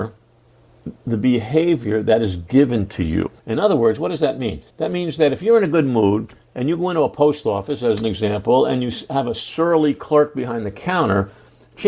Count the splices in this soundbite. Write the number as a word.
two